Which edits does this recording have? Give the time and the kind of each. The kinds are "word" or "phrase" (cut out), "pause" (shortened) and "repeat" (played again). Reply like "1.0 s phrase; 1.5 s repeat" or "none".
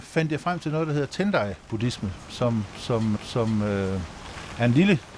3.2 s repeat